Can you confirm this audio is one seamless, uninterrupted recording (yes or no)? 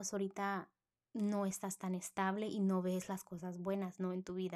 yes